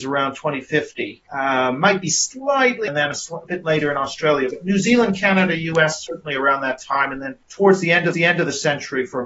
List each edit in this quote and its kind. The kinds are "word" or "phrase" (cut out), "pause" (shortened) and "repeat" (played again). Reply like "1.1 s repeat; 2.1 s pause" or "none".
1.3 s pause; 2.9 s phrase; 7.4 s pause; 8.1 s repeat